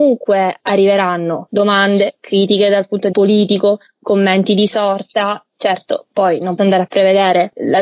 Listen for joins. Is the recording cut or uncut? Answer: cut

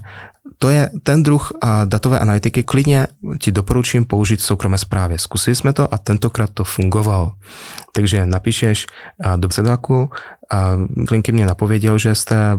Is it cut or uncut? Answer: cut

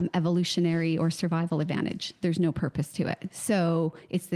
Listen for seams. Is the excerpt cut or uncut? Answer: uncut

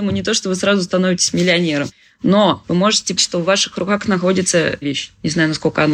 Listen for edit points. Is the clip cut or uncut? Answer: cut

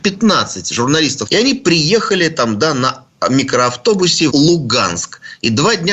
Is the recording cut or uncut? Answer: cut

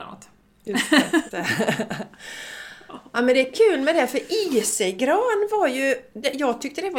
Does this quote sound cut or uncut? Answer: cut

